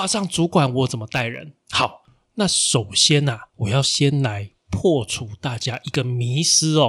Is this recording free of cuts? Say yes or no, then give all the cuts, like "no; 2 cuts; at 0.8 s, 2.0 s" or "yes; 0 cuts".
no; 2 cuts; at 1.6 s, 3.5 s